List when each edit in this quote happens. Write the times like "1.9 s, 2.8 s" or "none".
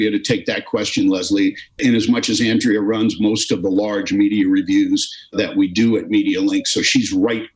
none